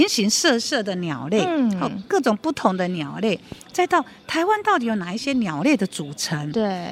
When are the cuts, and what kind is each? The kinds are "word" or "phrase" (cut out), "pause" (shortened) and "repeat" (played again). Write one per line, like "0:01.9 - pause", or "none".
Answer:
none